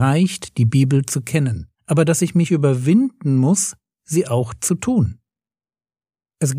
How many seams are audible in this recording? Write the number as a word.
one